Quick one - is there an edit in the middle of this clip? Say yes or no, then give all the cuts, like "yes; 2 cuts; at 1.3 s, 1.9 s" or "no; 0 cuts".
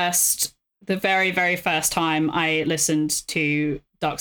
no; 0 cuts